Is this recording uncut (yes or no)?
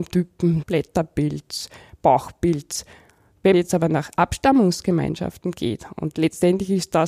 no